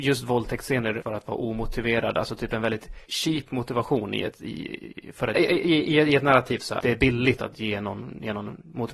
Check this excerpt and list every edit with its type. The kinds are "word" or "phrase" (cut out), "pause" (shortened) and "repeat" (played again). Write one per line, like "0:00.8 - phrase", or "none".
0:01.0 - word
0:03.1 - word
0:05.3 - word
0:06.8 - word
0:07.4 - word